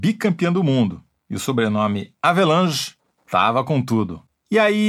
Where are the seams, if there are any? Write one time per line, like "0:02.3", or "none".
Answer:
none